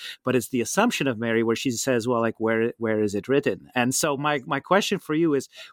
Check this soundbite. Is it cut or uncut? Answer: uncut